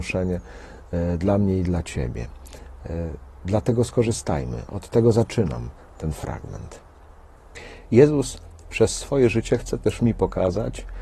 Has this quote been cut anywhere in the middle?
no; 0 cuts

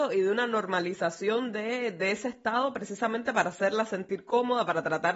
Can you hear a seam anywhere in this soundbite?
no; 0 cuts

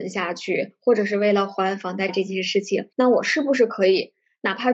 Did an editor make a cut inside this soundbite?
yes; 2 cuts; at 2.1 s, 2.9 s

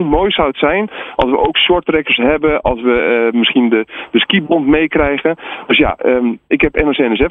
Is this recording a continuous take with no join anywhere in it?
yes; 0 cuts

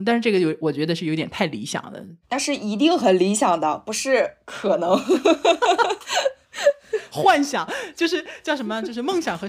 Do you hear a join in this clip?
yes; 1 cut; at 2.2 s

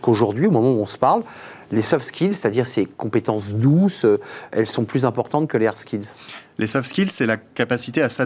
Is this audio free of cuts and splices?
no; 2 cuts; at 2.9 s, 4.5 s

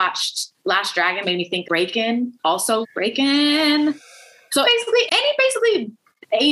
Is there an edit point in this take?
yes; 5 cuts; at 1.2 s, 1.6 s, 2.8 s, 4.6 s, 5.1 s

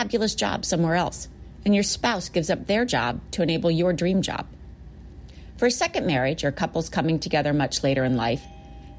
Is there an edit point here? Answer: no; 0 cuts

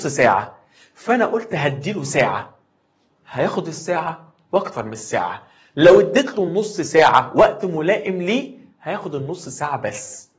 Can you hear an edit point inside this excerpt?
no; 0 cuts

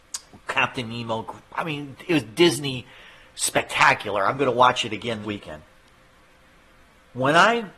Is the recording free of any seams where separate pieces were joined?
no; 1 cut; at 5.2 s

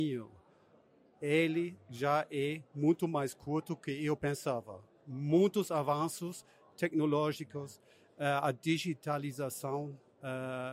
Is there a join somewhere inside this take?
no; 0 cuts

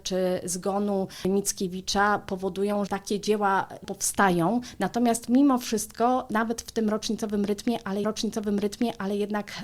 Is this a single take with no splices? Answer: no; 2 cuts; at 2.9 s, 8.0 s

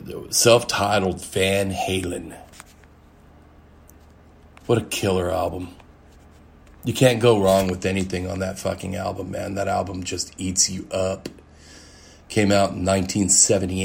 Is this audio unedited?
yes; 0 cuts

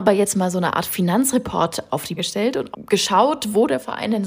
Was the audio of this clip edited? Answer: yes; 2 cuts; at 2.2 s, 2.7 s

